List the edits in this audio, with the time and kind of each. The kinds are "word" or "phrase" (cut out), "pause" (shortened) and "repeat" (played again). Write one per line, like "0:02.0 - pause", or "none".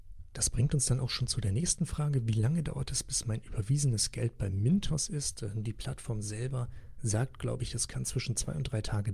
none